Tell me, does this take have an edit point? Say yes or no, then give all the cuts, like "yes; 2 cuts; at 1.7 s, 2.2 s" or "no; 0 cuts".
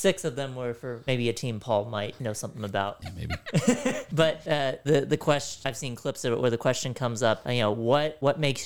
no; 0 cuts